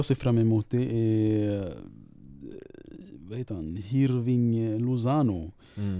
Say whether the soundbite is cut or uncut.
uncut